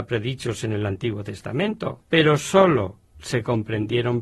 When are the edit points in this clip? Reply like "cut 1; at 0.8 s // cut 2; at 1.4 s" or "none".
cut 1; at 2.0 s